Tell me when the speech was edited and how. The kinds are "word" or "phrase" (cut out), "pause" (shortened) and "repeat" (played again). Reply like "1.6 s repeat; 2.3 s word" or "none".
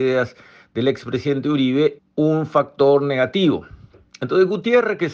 2.0 s word